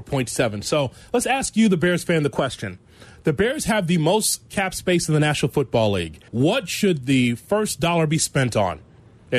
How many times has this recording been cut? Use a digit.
1